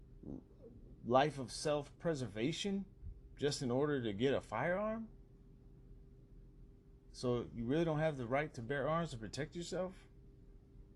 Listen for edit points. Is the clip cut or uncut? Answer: uncut